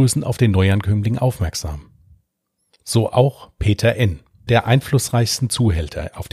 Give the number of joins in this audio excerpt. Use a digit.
1